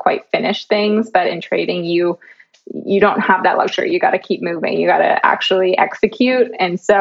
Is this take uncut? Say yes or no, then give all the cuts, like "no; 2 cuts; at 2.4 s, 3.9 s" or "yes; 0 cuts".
yes; 0 cuts